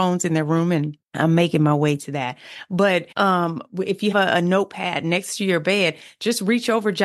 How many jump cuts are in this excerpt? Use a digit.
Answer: 3